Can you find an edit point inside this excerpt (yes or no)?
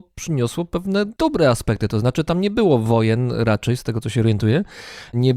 no